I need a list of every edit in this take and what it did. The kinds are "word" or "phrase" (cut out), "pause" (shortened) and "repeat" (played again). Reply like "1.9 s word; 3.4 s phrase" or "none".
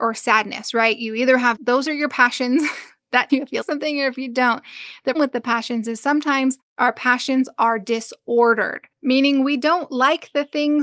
1.6 s word; 3.3 s word; 3.6 s word; 5.1 s word